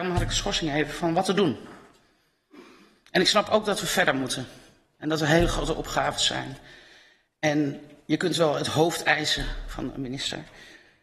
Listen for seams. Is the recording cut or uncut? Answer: uncut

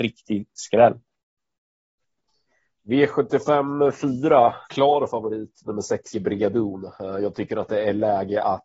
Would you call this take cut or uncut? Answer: cut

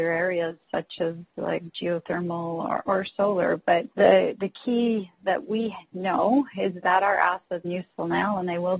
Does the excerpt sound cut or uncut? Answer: cut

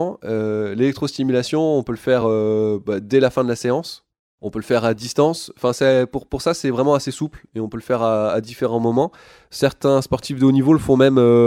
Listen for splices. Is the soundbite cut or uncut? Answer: uncut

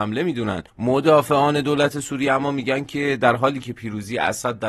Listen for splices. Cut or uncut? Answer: uncut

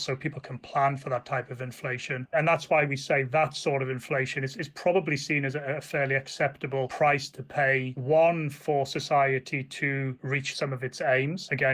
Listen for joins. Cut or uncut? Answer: uncut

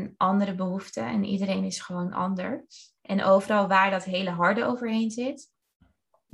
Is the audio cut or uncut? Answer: cut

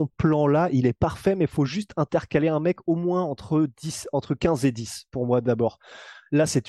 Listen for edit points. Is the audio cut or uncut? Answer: uncut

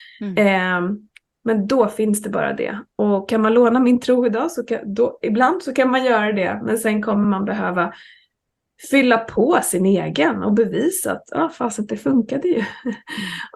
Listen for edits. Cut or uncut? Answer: uncut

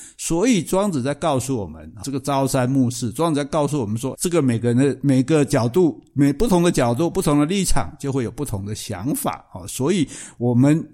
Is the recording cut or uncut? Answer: cut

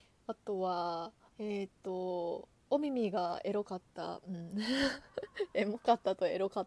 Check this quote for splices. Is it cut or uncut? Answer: cut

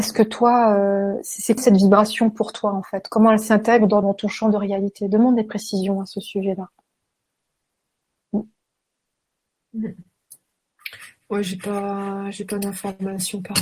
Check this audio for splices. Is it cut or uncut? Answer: cut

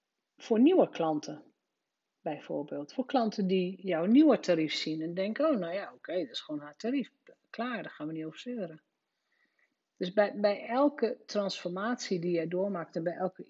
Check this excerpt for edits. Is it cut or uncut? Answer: uncut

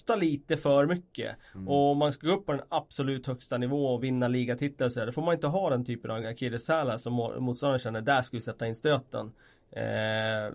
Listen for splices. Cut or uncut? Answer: uncut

